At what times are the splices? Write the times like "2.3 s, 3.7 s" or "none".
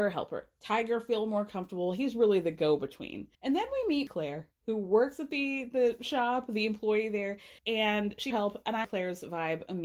3.3 s, 4.1 s, 4.5 s, 7.6 s, 8.3 s, 8.8 s